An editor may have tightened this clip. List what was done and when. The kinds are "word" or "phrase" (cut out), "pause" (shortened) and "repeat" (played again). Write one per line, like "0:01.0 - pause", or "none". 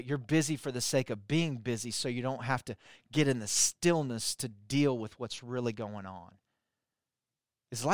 none